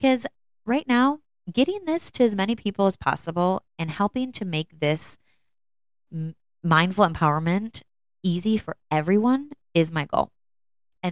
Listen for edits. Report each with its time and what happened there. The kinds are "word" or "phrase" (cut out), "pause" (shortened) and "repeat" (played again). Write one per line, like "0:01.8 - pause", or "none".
none